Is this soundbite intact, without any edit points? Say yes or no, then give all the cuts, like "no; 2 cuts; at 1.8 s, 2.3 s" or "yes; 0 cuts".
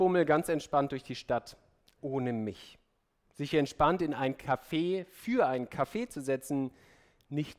yes; 0 cuts